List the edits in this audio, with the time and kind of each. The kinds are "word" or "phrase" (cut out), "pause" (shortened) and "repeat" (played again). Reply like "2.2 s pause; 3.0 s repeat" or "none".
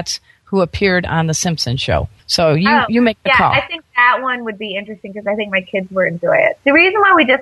none

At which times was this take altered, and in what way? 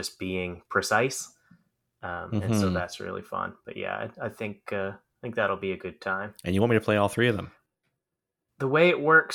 none

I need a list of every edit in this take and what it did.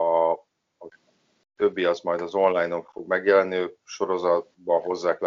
none

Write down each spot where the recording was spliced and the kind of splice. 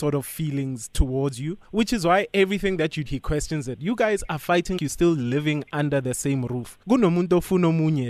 1.6 s pause; 3.1 s word; 4.8 s word; 6.8 s pause

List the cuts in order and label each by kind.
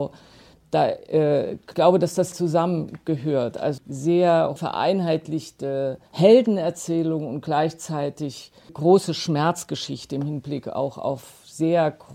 1.7 s word; 2.3 s word; 3.8 s word; 4.6 s word; 6.1 s pause; 8.7 s word

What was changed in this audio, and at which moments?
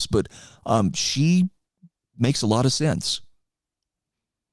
none

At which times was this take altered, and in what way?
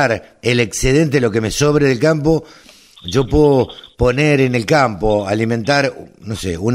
none

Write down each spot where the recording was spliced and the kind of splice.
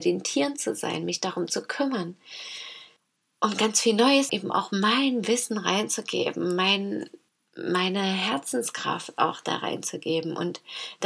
3.0 s pause; 4.3 s phrase; 7.3 s pause

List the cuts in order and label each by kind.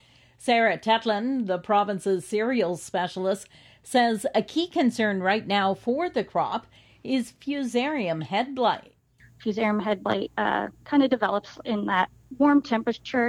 none

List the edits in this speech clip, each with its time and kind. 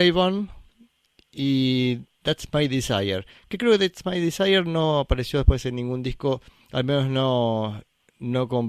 none

